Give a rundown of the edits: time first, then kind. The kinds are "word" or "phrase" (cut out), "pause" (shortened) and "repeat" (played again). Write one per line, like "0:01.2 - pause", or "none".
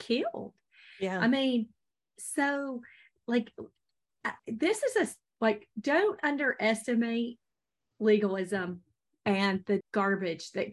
0:04.4 - pause
0:09.8 - word

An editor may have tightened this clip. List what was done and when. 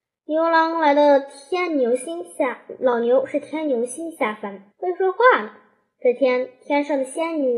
0:04.7 - pause

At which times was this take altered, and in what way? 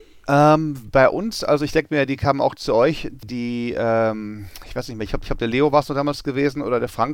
0:05.2 - repeat

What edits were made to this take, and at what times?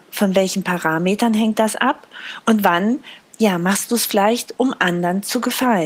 none

